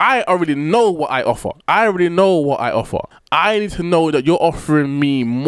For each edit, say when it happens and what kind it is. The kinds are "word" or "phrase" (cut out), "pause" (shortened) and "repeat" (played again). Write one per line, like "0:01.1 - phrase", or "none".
0:01.6 - pause
0:03.1 - pause